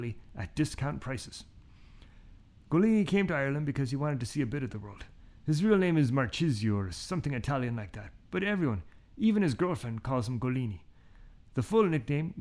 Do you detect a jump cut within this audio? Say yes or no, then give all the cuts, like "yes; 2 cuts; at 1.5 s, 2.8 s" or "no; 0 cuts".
no; 0 cuts